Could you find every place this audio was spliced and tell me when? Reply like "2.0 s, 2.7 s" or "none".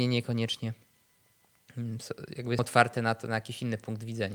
2.6 s